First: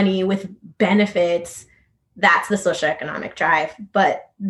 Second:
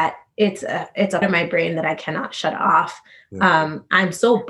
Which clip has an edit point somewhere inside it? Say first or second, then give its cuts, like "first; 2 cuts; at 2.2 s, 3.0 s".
second; 1 cut; at 1.2 s